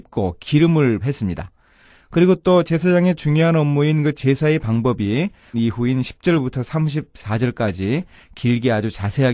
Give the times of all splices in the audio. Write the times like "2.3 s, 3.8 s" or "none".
1.0 s, 5.5 s